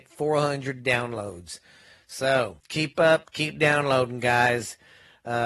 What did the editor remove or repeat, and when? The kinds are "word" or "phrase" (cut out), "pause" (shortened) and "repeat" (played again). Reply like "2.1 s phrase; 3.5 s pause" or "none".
2.6 s pause